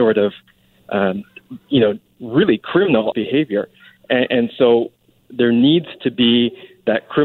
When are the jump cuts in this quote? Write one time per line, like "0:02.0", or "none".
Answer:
0:03.1